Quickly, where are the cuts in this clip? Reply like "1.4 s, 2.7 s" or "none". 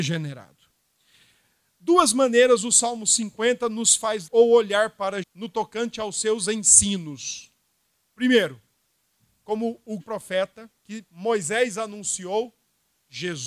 4.3 s, 5.2 s, 10.0 s, 10.8 s